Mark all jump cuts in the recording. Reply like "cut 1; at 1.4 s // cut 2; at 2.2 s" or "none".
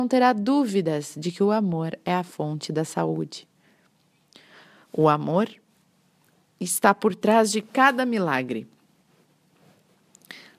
none